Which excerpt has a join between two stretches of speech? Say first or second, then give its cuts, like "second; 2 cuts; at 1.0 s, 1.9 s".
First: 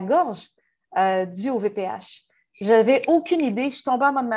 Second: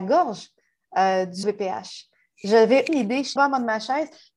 second; 3 cuts; at 1.4 s, 2.9 s, 3.4 s